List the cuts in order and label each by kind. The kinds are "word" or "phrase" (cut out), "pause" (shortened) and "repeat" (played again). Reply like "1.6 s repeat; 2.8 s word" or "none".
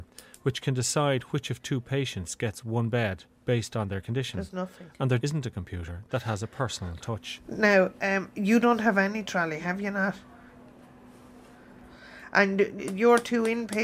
5.2 s word; 12.8 s word

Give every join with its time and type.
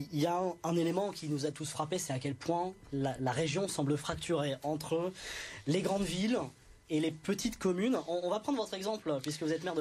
3.2 s word

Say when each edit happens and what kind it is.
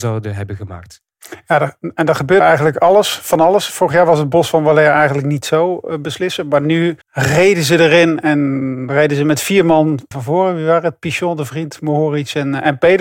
2.4 s word; 7.0 s pause; 10.1 s word

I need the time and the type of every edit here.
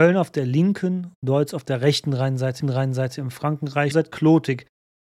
1.2 s word; 2.6 s repeat; 3.9 s word

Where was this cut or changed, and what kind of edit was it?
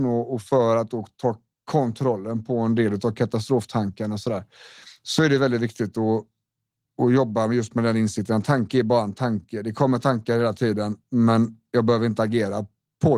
none

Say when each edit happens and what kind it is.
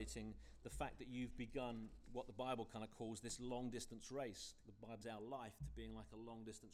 5.0 s word

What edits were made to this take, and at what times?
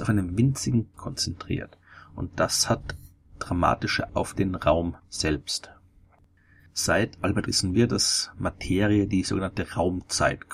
0.9 s phrase; 4.1 s word; 5.0 s pause; 7.5 s word

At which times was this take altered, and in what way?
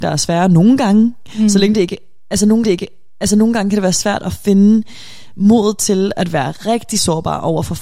2.6 s repeat

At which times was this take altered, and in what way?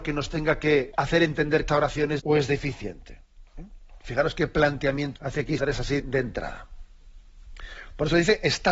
0.9 s word; 1.7 s word; 2.2 s word; 5.2 s word; 5.6 s word; 6.0 s word

